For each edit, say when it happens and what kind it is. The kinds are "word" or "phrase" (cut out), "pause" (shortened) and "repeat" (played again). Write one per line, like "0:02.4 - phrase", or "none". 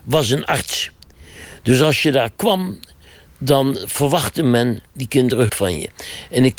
0:05.5 - word

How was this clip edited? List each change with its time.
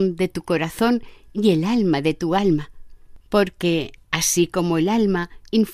0:03.2 - pause

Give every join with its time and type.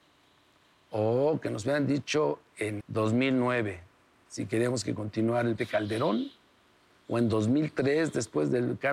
0:02.8 - word
0:05.6 - word

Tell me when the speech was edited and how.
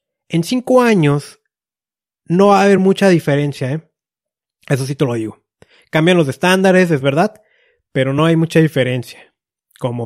none

